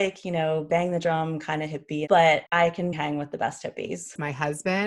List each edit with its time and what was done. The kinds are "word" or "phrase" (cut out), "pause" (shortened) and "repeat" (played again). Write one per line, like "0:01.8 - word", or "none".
0:02.5 - pause
0:02.9 - word